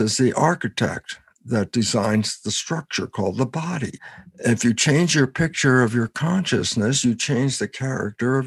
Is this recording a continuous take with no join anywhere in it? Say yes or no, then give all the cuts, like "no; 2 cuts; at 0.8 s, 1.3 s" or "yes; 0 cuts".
yes; 0 cuts